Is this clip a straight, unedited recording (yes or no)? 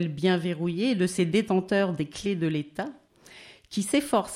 yes